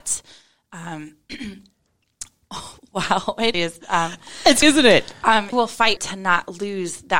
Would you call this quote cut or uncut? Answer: cut